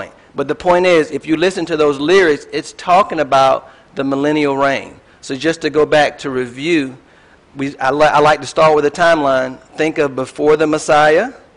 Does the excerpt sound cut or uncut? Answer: cut